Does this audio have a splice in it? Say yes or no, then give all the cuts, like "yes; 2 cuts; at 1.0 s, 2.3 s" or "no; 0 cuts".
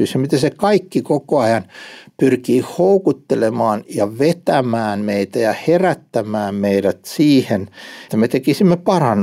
yes; 1 cut; at 8.1 s